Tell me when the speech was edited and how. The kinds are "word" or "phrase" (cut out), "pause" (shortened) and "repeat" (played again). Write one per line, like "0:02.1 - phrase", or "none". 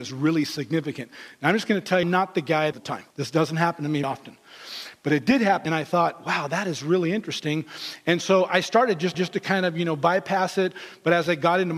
0:02.0 - phrase
0:02.7 - phrase
0:03.1 - pause
0:04.0 - word
0:05.7 - phrase
0:09.1 - repeat